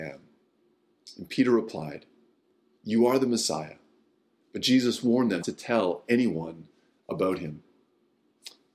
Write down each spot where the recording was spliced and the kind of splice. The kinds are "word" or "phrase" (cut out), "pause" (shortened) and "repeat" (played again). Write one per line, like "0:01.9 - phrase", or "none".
0:05.4 - word

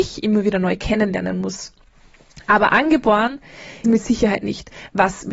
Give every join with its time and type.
0:03.8 - phrase

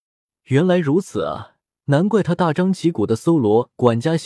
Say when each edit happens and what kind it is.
0:01.6 - pause

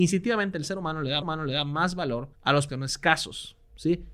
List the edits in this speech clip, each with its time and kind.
0:01.2 - repeat
0:02.3 - pause
0:02.7 - word

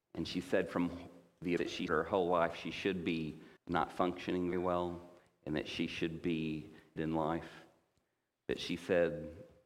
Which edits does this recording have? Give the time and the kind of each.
0:01.6 - word
0:01.9 - word
0:03.6 - pause
0:04.5 - word
0:07.0 - word

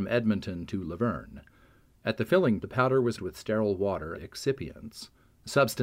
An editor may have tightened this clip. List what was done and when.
0:02.6 - word
0:03.2 - word
0:04.1 - word

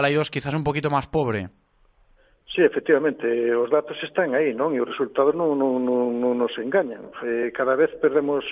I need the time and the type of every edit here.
none

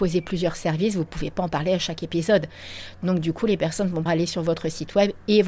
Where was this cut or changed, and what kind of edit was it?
0:04.1 - word

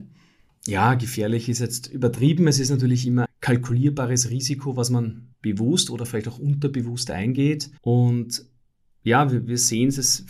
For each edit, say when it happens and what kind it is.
0:03.3 - word
0:05.3 - pause
0:07.8 - pause

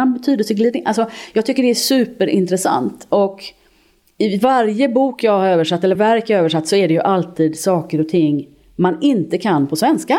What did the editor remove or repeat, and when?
0:05.9 - word

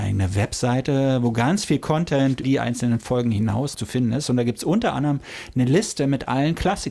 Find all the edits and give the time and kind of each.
0:02.4 - word
0:03.7 - word

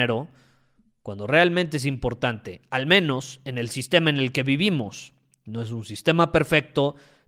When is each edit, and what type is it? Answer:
none

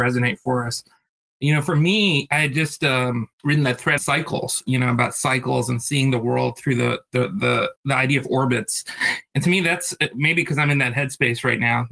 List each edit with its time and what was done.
0:03.3 - pause
0:04.0 - word
0:07.8 - pause

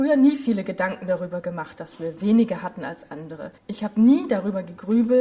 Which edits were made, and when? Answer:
0:03.6 - pause

